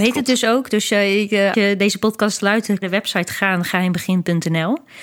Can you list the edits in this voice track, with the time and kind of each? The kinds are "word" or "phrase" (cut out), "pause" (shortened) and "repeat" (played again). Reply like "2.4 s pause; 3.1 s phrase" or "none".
1.5 s word; 2.8 s phrase